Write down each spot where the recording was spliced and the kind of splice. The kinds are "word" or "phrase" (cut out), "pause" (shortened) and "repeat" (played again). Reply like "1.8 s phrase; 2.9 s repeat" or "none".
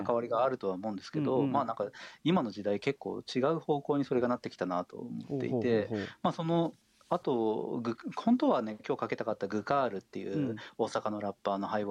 none